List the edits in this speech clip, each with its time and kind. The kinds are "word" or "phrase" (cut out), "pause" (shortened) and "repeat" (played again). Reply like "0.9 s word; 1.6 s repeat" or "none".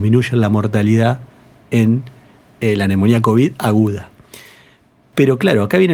none